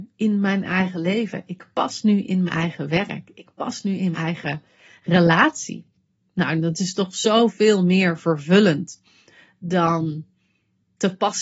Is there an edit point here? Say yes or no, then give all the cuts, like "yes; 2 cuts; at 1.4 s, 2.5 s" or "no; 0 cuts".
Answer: yes; 2 cuts; at 2.5 s, 4.1 s